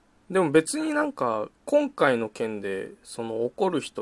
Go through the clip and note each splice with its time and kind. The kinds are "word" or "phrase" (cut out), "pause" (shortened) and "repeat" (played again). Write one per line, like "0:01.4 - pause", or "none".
0:01.6 - pause

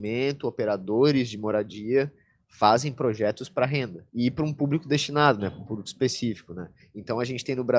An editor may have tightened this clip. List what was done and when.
0:04.1 - pause

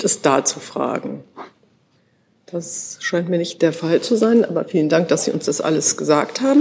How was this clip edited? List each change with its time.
none

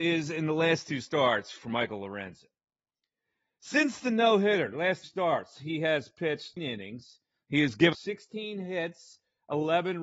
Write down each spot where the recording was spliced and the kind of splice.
0:05.0 - word
0:06.6 - word
0:07.9 - word

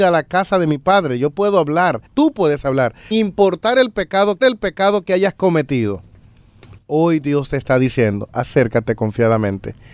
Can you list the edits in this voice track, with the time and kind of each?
0:02.1 - pause
0:03.1 - word
0:04.4 - repeat

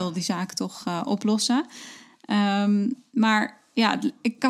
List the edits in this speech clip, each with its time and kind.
none

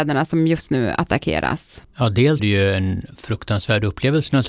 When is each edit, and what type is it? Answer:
0:02.4 - phrase

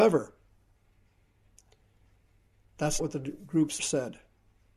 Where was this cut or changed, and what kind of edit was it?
0:03.0 - word
0:03.8 - word

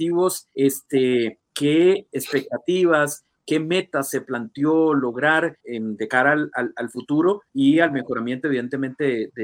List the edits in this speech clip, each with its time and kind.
0:02.1 - word
0:05.6 - word

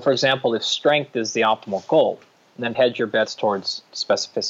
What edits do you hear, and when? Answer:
0:02.7 - word

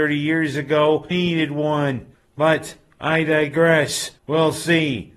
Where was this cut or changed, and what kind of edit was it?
0:01.1 - word
0:02.1 - pause
0:04.2 - pause

